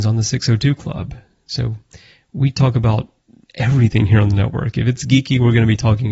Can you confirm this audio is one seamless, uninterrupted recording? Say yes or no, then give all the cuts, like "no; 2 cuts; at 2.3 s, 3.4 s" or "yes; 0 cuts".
yes; 0 cuts